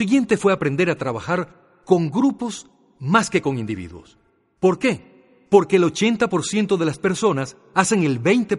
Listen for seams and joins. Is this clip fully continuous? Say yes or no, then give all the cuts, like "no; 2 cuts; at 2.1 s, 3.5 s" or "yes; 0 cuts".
yes; 0 cuts